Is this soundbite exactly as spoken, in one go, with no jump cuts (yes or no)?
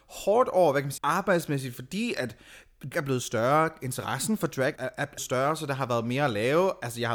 no